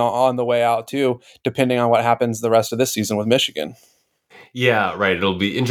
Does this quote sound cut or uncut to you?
uncut